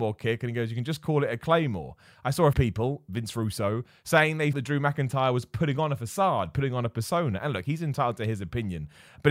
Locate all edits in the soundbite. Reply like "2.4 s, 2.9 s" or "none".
2.5 s, 4.5 s